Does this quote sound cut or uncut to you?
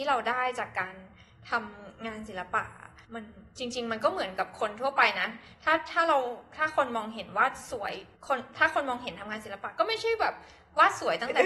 cut